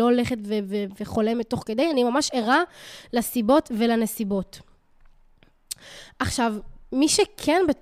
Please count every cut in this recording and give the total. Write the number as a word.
zero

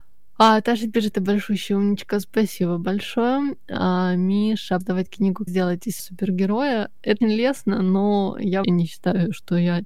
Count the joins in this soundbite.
six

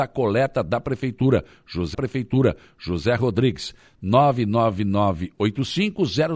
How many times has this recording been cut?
one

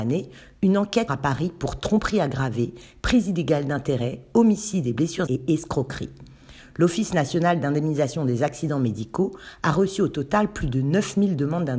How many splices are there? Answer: two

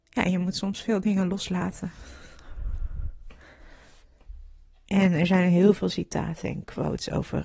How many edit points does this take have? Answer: zero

